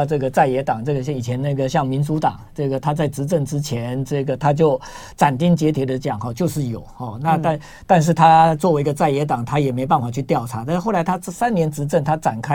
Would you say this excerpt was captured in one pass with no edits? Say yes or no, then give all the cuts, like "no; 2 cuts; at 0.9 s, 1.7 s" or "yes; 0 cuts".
yes; 0 cuts